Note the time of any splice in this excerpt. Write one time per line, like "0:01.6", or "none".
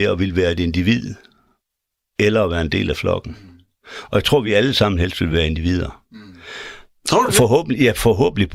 none